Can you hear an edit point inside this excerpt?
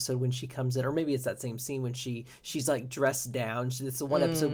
no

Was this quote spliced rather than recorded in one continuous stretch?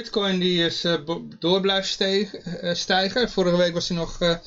no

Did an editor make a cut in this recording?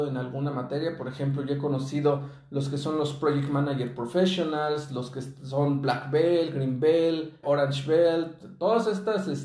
yes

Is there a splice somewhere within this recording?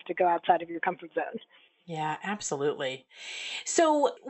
no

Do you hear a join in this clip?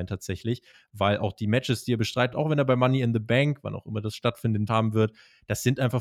yes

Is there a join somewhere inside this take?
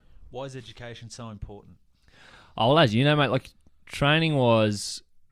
no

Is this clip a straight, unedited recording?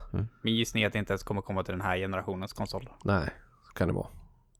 yes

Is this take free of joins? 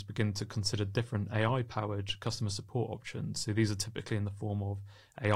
yes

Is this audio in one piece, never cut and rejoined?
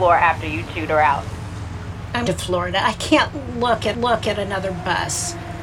no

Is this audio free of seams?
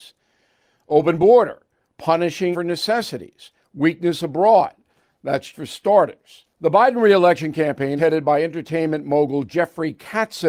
no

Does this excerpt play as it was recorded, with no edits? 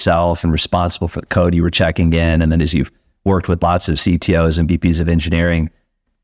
yes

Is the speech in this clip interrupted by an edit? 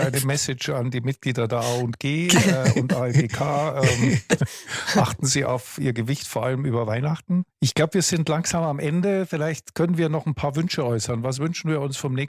yes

